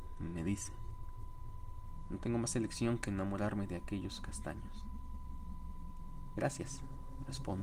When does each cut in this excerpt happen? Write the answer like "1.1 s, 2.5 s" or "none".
4.2 s